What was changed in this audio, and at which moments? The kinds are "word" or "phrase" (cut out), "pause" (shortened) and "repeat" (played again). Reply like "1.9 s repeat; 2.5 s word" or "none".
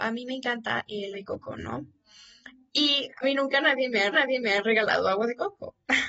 1.1 s word; 3.2 s word; 4.1 s repeat